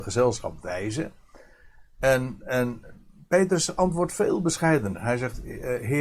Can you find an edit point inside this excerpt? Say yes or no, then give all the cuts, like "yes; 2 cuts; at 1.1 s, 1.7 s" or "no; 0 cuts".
no; 0 cuts